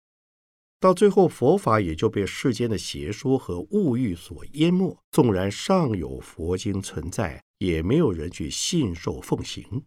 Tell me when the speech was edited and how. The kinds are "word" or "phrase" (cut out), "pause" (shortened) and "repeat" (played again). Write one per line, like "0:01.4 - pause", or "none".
0:05.0 - pause
0:07.5 - pause

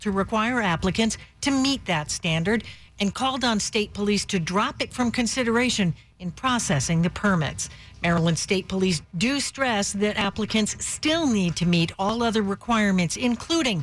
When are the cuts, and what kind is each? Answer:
none

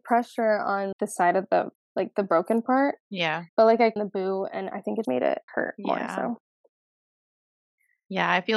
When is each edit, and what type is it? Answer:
0:00.9 - word
0:01.8 - pause
0:03.5 - pause
0:04.0 - phrase
0:05.0 - word
0:05.5 - word

